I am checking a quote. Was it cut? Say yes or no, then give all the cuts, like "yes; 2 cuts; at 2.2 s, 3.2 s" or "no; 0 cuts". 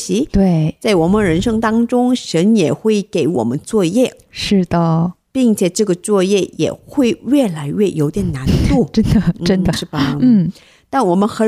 yes; 1 cut; at 9.7 s